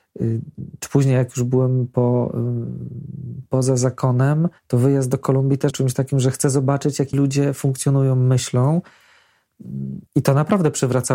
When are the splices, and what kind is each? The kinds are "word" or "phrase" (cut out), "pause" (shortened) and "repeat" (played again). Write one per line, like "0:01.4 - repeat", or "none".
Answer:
0:04.6 - pause
0:05.7 - word
0:07.1 - word
0:10.1 - pause